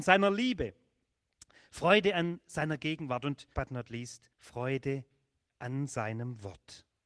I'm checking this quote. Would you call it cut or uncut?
cut